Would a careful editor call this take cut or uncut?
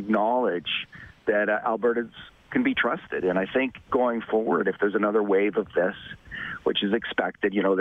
uncut